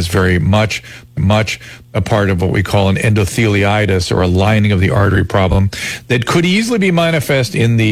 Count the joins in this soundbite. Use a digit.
1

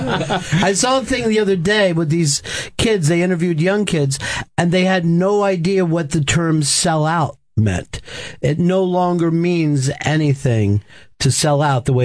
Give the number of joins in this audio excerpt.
0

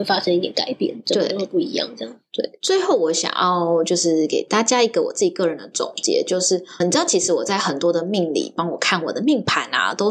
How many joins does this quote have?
1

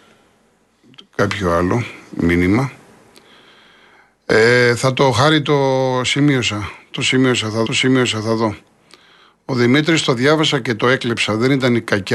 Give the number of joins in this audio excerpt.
1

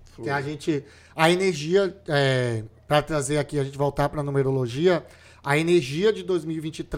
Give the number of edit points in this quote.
0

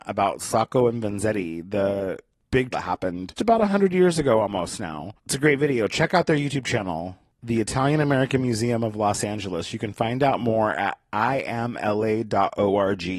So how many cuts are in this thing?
3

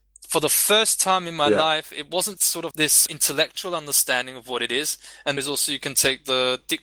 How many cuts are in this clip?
4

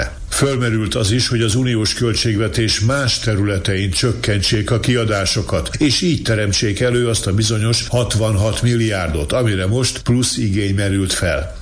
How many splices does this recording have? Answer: 0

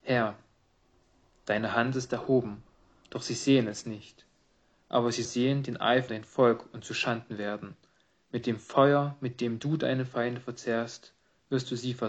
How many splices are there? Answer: 2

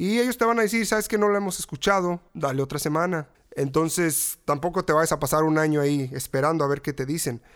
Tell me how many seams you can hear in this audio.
2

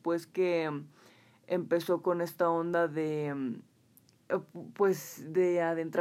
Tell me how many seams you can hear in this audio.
0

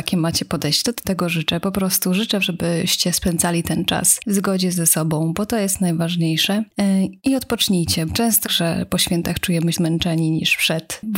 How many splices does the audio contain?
6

